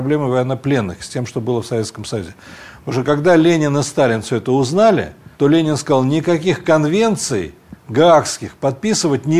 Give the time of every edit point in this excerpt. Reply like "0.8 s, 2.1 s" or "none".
5.3 s